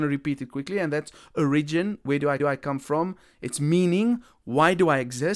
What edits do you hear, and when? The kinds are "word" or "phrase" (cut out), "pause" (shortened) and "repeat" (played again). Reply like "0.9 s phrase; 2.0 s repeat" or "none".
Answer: 2.4 s repeat